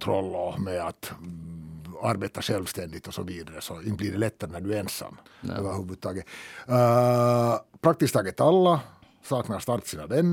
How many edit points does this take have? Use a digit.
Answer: 1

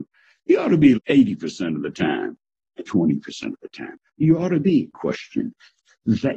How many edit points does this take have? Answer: 3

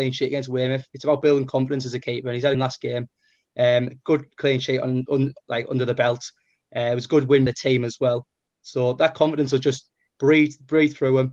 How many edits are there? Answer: 2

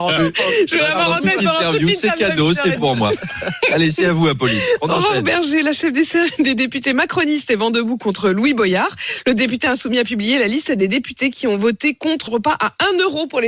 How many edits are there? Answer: 1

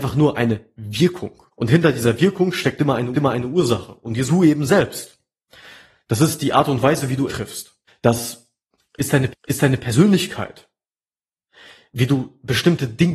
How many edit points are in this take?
6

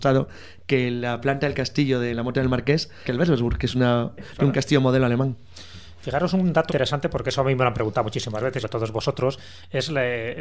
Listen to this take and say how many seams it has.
4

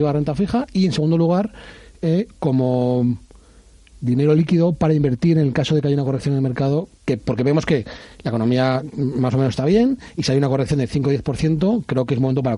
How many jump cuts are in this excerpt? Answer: 0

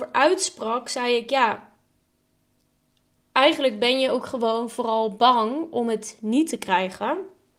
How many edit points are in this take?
0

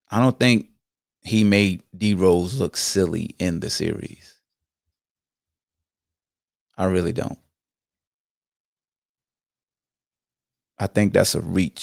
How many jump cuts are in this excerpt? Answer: 0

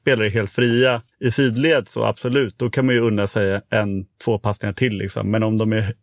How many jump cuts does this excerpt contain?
1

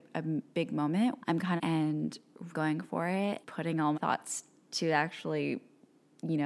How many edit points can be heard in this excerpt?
5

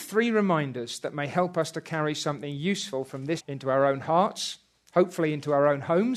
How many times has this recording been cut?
1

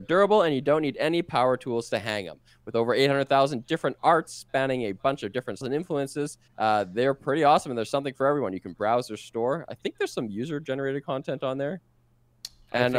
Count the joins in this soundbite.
2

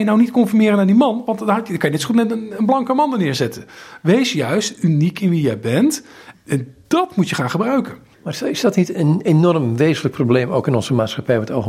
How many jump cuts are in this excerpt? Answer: 1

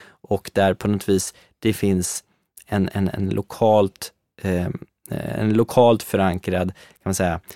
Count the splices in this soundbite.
0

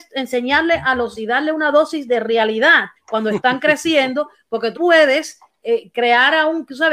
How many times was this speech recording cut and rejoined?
3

